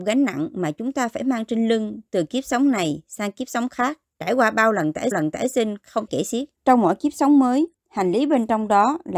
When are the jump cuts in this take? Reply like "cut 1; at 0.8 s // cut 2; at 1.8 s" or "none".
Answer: cut 1; at 5.1 s // cut 2; at 6.1 s // cut 3; at 6.6 s // cut 4; at 7.7 s

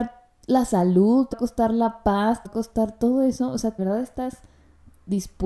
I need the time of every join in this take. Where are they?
cut 1; at 1.3 s // cut 2; at 2.4 s // cut 3; at 3.8 s

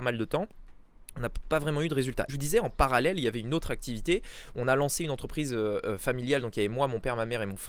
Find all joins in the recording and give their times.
cut 1; at 2.3 s

